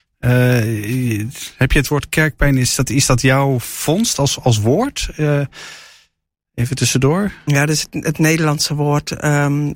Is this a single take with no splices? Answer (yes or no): yes